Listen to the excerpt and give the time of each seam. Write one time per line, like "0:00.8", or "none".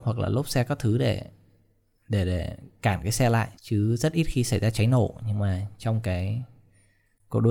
0:03.6